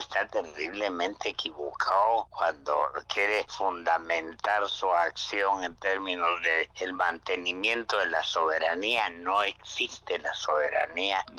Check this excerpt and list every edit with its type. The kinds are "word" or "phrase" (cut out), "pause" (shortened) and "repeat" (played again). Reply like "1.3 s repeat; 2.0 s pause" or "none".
none